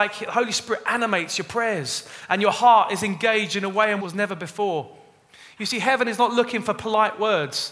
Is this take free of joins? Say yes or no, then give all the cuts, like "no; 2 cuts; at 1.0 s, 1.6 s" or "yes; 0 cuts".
no; 1 cut; at 4.0 s